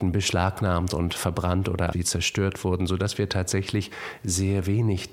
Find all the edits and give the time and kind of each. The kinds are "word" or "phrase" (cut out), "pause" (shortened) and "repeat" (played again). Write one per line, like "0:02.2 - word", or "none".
0:01.9 - word